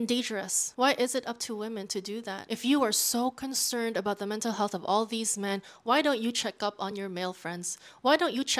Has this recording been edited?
no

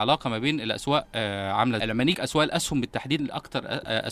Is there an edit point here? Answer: yes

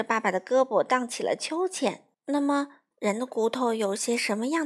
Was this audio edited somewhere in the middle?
yes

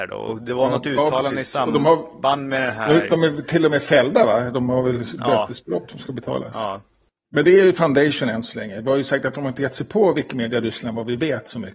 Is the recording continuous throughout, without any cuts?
yes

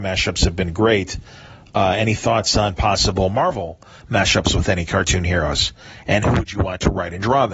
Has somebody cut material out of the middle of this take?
no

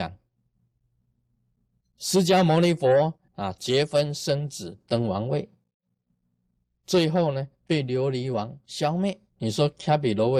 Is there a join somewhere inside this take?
yes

